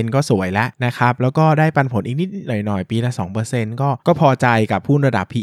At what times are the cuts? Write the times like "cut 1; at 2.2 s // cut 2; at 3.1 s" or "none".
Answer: cut 1; at 4.0 s

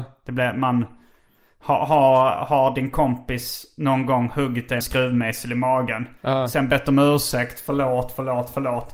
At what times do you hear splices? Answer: cut 1; at 4.8 s

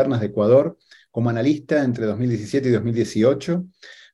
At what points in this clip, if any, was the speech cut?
none

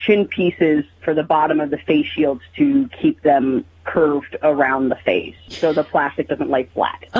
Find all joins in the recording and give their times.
none

